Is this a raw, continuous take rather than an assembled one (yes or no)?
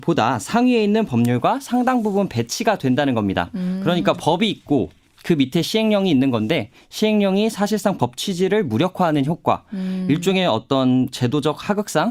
yes